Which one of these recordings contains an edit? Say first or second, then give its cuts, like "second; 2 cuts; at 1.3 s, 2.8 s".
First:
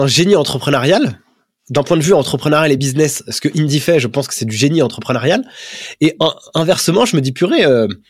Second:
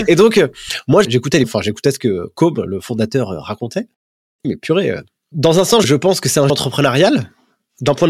second; 5 cuts; at 1.0 s, 1.4 s, 4.4 s, 5.8 s, 6.5 s